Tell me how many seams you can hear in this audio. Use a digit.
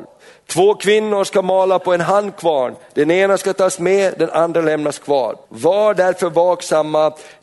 1